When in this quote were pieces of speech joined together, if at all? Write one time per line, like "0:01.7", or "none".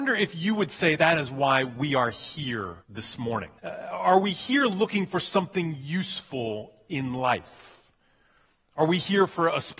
0:01.0
0:02.8
0:03.6